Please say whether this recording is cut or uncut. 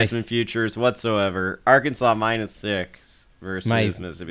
uncut